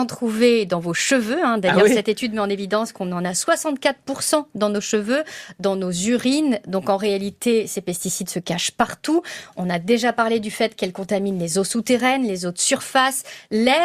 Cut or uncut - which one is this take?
uncut